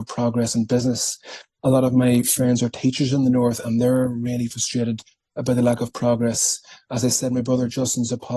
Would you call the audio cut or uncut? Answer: uncut